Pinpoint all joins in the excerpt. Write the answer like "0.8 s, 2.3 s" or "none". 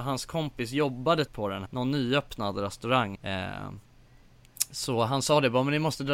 1.3 s, 1.7 s, 3.1 s